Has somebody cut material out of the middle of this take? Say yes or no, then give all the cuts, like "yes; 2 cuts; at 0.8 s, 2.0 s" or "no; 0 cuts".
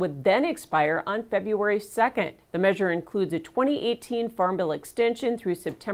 yes; 1 cut; at 2.4 s